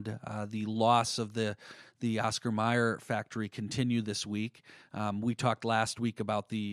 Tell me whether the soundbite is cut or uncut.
uncut